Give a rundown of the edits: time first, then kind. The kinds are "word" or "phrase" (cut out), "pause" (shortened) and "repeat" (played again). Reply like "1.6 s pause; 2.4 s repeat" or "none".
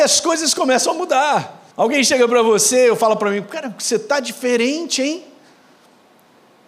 1.7 s pause